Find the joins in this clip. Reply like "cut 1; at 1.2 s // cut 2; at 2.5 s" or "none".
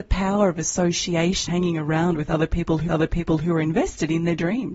cut 1; at 1.5 s // cut 2; at 2.9 s